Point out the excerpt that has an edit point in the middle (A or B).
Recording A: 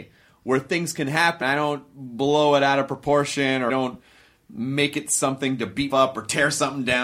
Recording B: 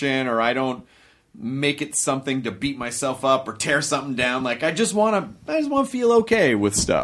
A